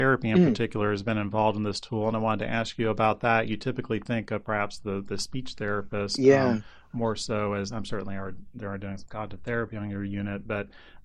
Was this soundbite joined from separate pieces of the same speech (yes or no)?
no